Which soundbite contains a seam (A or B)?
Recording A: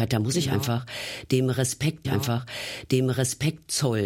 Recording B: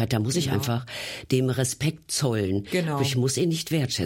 A